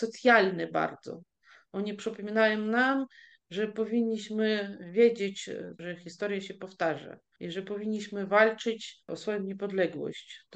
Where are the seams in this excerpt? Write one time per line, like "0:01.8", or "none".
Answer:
none